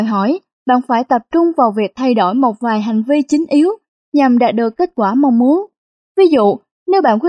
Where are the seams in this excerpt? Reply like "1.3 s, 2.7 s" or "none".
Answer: none